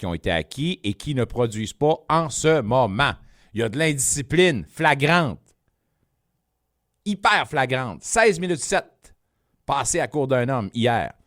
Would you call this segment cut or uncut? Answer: uncut